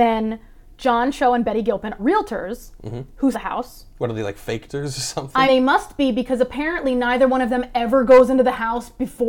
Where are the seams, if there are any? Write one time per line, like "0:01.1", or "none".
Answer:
0:02.0
0:03.3
0:05.5